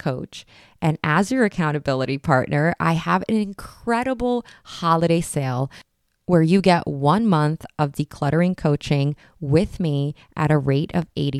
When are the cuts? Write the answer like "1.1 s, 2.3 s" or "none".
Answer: none